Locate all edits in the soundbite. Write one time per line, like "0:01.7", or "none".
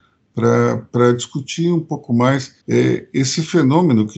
0:02.6